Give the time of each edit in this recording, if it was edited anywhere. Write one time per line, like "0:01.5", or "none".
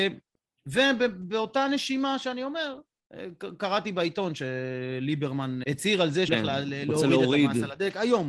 0:05.6
0:06.3